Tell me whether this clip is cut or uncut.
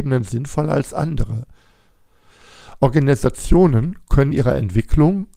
cut